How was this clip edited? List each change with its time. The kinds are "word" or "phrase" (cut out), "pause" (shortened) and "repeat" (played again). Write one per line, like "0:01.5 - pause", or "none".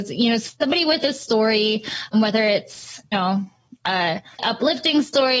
0:02.1 - word
0:03.1 - word
0:04.4 - word